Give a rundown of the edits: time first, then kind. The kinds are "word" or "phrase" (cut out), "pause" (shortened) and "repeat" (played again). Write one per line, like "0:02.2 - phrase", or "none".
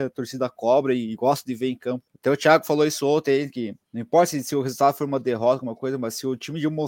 0:02.1 - pause
0:03.8 - pause